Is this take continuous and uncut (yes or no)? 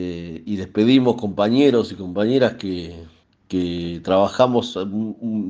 yes